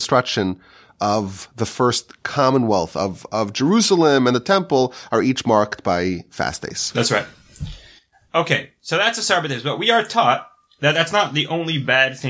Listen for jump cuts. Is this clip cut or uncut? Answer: uncut